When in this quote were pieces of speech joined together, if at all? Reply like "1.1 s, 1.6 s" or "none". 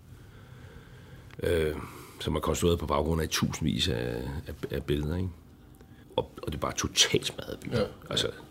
6.0 s